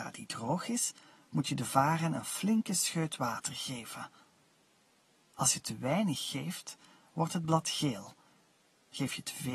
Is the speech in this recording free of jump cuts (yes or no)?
yes